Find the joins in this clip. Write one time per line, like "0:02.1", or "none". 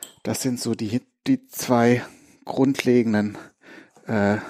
none